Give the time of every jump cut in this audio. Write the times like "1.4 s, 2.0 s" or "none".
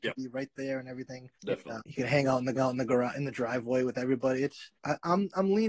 1.4 s, 1.8 s, 2.5 s, 4.7 s